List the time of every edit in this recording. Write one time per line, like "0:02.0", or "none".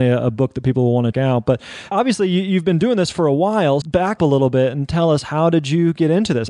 0:01.1
0:03.8
0:04.2